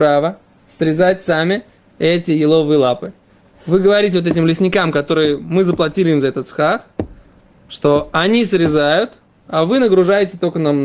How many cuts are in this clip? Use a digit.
1